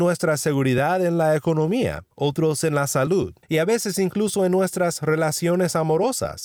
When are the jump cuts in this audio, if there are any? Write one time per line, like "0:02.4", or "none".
0:02.1
0:03.4